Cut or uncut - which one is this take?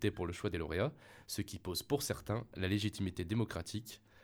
uncut